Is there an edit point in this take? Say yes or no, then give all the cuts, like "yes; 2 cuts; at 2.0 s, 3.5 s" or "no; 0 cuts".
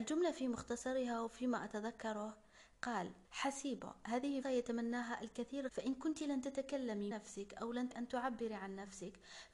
yes; 5 cuts; at 3.3 s, 4.4 s, 5.7 s, 7.1 s, 7.9 s